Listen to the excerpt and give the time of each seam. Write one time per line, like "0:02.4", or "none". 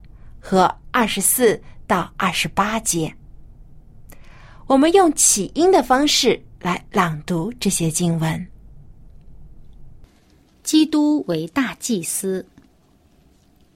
none